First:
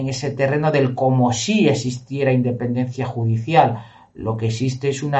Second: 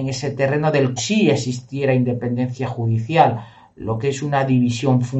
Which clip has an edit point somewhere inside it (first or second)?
second